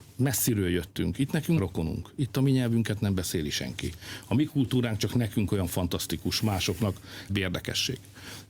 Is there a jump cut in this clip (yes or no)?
yes